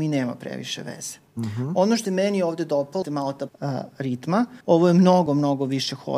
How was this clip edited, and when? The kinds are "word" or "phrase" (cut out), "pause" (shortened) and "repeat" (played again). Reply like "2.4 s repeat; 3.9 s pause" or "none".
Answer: 1.3 s pause; 2.1 s word; 3.0 s word; 3.5 s word; 4.6 s pause; 5.3 s word